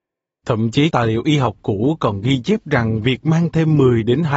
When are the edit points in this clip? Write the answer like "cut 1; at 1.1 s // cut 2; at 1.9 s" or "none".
cut 1; at 0.9 s